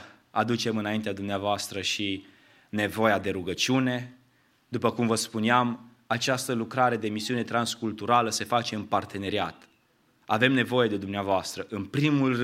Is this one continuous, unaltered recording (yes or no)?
yes